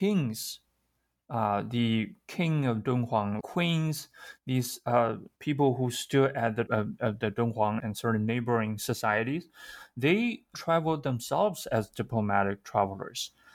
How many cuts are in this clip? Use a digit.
5